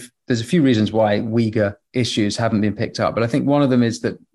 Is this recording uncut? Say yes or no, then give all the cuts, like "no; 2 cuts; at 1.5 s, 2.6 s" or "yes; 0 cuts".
yes; 0 cuts